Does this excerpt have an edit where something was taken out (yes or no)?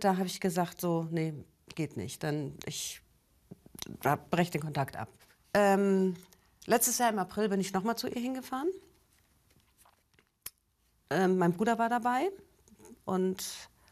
no